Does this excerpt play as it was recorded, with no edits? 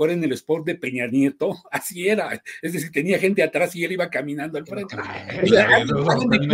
yes; 0 cuts

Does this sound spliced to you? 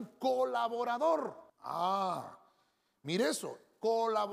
yes; 1 cut; at 1.5 s

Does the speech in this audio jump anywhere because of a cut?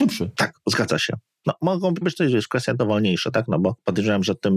yes; 2 cuts; at 2.0 s, 2.8 s

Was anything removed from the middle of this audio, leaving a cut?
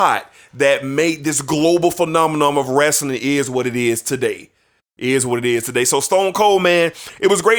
no; 0 cuts

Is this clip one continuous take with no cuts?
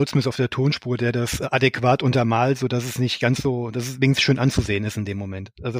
yes; 0 cuts

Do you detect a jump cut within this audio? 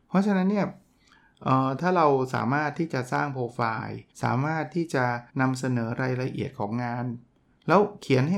yes; 2 cuts; at 4.1 s, 5.3 s

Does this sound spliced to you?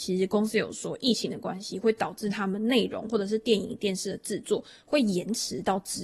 no; 0 cuts

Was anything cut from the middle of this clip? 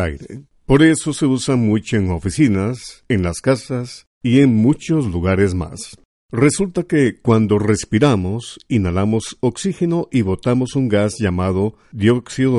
no; 0 cuts

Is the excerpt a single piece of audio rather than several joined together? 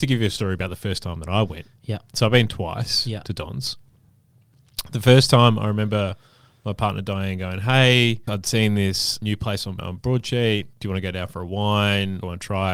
yes; 0 cuts

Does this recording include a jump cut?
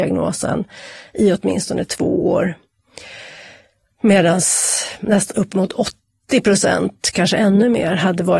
no; 0 cuts

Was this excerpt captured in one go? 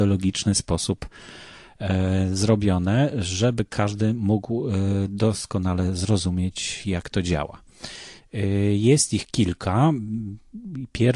yes; 0 cuts

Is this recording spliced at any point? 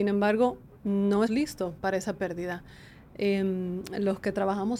yes; 2 cuts; at 1.3 s, 1.8 s

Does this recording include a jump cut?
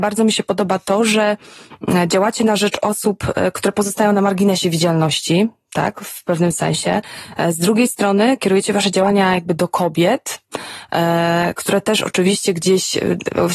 no; 0 cuts

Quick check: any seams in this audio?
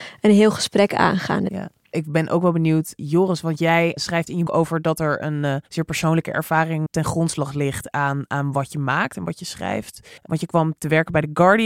yes; 4 cuts; at 4.5 s, 5.7 s, 6.9 s, 10.2 s

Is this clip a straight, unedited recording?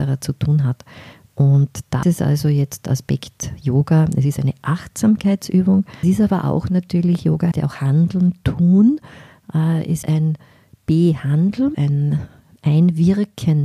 no; 5 cuts; at 2.0 s, 6.0 s, 7.5 s, 10.0 s, 11.7 s

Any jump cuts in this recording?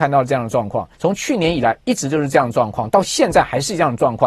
yes; 1 cut; at 0.9 s

